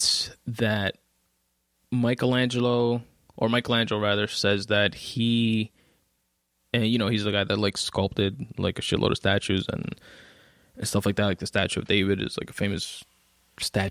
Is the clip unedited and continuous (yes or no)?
yes